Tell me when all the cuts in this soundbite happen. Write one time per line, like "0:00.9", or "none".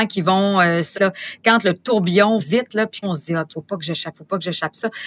0:00.9
0:02.4
0:03.0
0:03.5
0:04.1

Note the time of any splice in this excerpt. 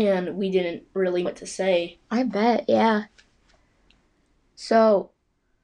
0:01.3

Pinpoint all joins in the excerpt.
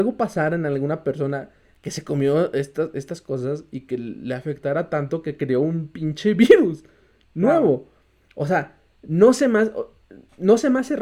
none

